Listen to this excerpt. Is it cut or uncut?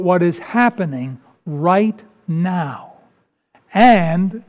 uncut